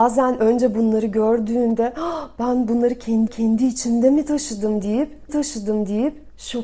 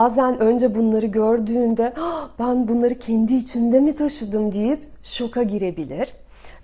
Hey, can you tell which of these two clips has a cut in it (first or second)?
first